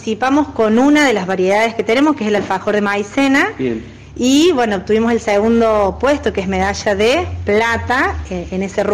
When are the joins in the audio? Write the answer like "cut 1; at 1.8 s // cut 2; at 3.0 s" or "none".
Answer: none